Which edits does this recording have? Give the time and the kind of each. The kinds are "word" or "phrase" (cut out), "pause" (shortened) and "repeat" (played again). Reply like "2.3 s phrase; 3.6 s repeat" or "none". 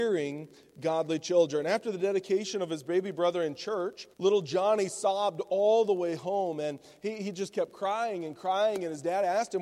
4.1 s pause